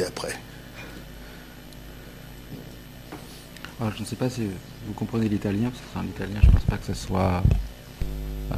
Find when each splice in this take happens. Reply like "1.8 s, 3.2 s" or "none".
none